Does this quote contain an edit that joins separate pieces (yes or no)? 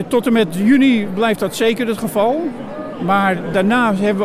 no